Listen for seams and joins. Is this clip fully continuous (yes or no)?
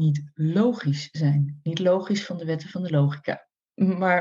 yes